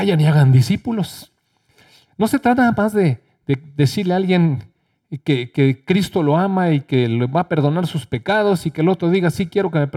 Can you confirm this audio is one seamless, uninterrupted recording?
yes; 0 cuts

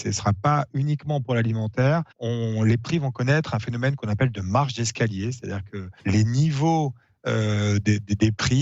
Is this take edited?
yes; 2 cuts; at 2.1 s, 6.0 s

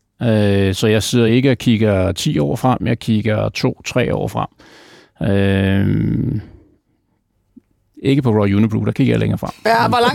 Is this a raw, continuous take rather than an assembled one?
yes; 0 cuts

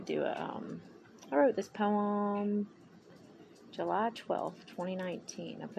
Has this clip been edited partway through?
no; 0 cuts

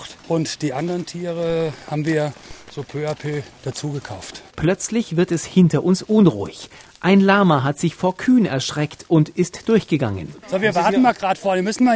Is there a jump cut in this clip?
yes; 1 cut; at 4.5 s

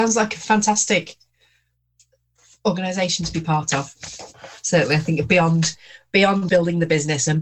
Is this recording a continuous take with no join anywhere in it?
no; 1 cut; at 6.5 s

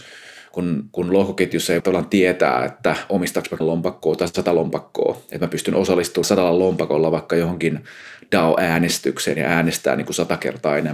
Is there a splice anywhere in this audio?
yes; 3 cuts; at 1.8 s, 3.6 s, 6.2 s

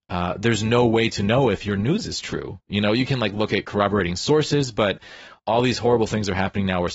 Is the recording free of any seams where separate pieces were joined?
yes; 0 cuts

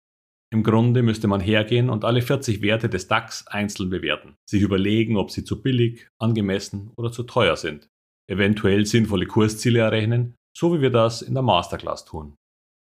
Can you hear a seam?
yes; 3 cuts; at 4.4 s, 8.0 s, 10.4 s

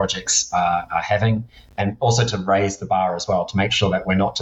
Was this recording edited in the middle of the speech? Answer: no; 0 cuts

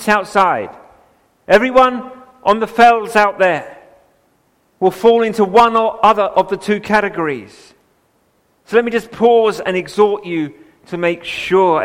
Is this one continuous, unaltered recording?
yes; 0 cuts

